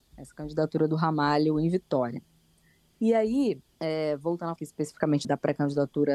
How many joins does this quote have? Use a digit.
3